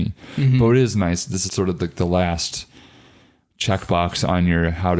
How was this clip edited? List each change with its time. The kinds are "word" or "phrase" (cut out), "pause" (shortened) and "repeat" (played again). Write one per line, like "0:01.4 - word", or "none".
0:01.5 - word